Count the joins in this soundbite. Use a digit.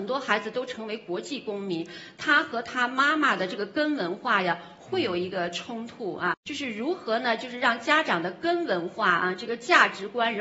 1